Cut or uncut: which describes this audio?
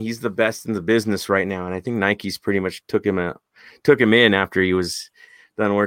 uncut